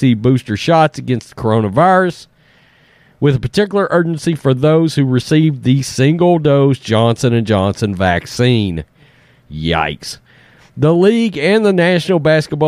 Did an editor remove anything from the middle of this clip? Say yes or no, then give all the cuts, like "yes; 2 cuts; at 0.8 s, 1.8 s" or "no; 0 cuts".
no; 0 cuts